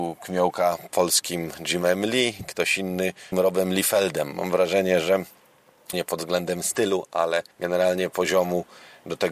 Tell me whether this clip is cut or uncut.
cut